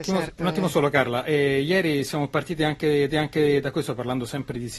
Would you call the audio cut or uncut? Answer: cut